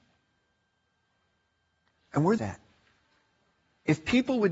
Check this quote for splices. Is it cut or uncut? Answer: cut